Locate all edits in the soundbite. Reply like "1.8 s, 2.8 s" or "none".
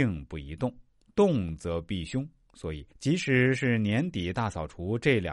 2.9 s